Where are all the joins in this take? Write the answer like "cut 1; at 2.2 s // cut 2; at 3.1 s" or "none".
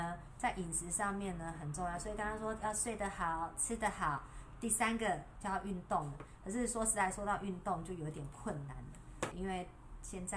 cut 1; at 9.3 s